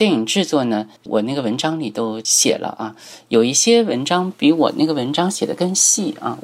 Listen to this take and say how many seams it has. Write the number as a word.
one